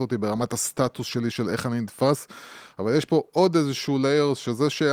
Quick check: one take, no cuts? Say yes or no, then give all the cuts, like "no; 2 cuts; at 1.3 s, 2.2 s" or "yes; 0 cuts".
yes; 0 cuts